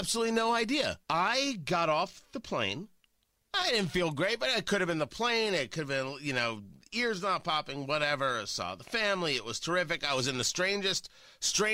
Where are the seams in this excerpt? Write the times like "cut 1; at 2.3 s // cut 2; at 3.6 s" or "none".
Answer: cut 1; at 1.0 s // cut 2; at 3.3 s